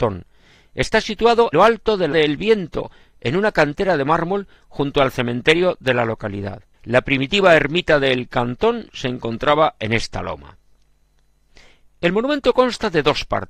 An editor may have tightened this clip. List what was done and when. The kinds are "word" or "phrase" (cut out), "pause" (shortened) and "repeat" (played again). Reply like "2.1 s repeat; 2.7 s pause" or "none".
1.5 s word; 2.1 s word; 6.7 s pause